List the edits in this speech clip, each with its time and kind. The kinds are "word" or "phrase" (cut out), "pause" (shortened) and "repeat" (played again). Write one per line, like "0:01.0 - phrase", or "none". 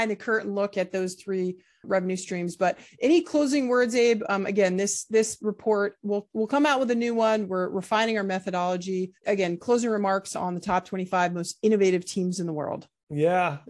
0:09.2 - pause